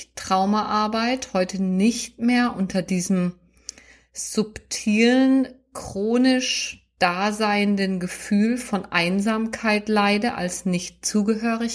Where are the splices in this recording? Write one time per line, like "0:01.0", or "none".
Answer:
none